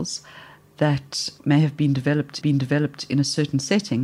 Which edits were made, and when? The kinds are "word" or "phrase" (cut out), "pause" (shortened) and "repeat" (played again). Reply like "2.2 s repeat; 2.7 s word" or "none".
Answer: 2.4 s repeat